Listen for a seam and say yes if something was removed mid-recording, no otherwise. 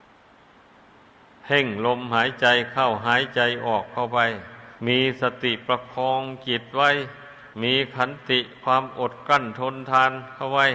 yes